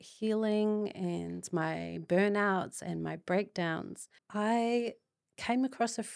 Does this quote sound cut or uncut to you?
cut